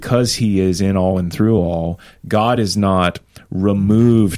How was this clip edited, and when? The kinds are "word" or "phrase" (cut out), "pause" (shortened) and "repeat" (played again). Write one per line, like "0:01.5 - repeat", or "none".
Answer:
none

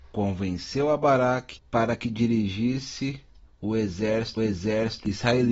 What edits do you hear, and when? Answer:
0:03.5 - pause
0:04.4 - repeat

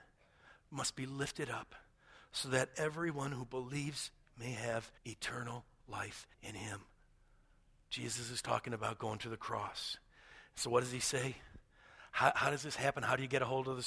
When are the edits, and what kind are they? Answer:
0:05.0 - pause
0:06.3 - pause

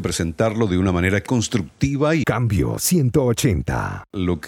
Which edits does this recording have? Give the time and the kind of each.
0:01.3 - word
0:02.2 - word

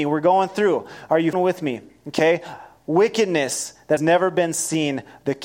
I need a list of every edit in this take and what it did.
0:01.3 - word
0:04.0 - word

